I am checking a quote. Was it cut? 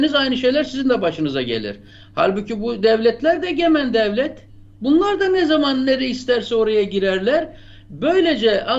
no; 0 cuts

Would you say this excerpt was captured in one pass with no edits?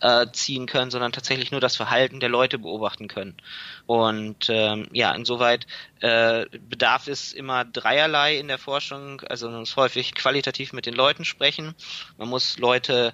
no; 4 cuts; at 3.8 s, 6.6 s, 7.7 s, 10.1 s

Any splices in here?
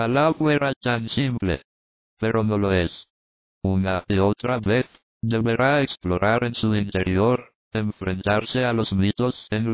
no; 0 cuts

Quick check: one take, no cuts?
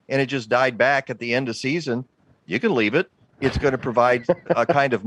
yes; 0 cuts

